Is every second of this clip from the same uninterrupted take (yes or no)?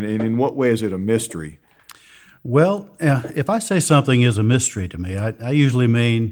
yes